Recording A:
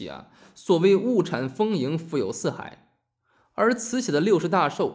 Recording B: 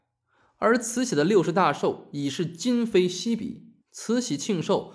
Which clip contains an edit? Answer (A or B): B